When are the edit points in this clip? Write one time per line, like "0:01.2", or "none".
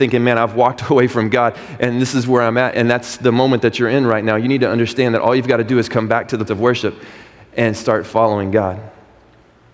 0:02.7
0:06.5